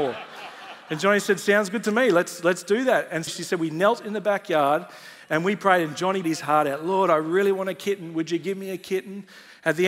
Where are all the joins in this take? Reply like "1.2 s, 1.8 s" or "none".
3.3 s, 6.2 s